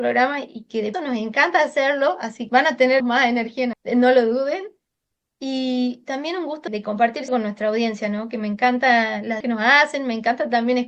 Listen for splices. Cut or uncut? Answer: cut